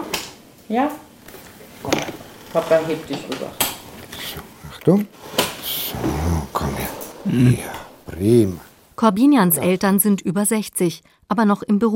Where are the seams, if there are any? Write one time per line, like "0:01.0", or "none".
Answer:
none